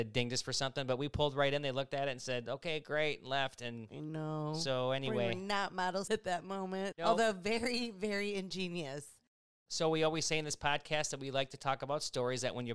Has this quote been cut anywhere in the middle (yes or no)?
yes